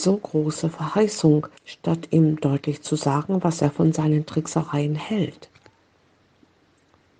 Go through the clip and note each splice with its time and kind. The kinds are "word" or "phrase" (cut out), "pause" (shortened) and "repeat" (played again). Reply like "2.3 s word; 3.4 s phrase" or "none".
1.6 s pause